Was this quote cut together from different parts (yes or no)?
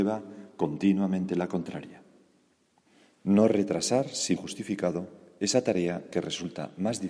yes